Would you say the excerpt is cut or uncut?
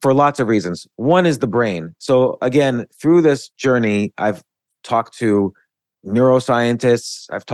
uncut